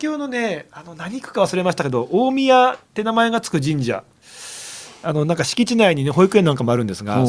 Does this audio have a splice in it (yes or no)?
no